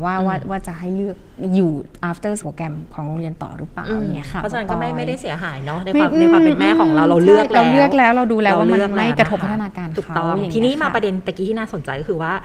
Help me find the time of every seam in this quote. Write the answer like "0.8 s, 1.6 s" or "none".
2.4 s